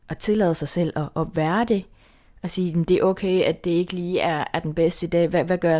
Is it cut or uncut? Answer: uncut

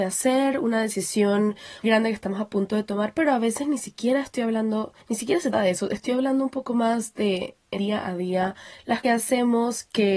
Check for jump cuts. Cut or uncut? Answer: cut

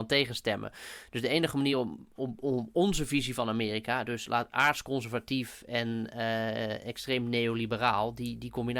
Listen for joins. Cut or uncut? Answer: uncut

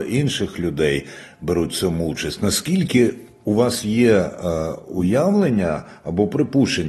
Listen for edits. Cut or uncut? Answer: uncut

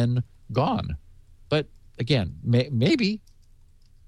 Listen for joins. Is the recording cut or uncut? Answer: uncut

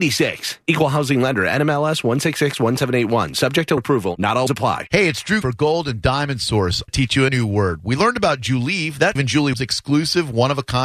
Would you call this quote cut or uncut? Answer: cut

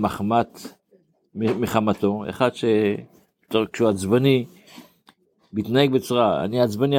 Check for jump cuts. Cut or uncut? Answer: uncut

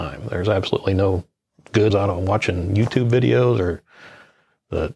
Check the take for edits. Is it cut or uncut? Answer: cut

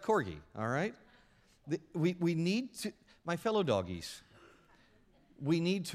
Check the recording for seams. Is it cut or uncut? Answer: uncut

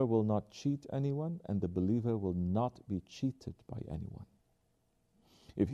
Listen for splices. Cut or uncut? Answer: uncut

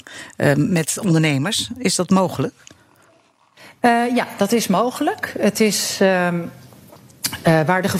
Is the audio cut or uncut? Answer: uncut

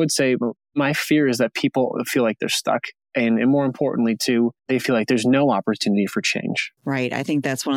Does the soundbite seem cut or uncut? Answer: cut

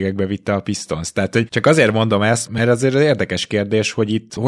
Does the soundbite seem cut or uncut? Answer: uncut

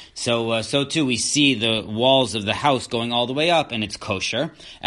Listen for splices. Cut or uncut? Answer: uncut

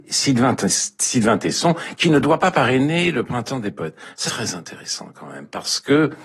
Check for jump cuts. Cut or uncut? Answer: cut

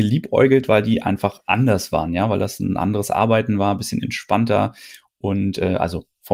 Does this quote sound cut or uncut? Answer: uncut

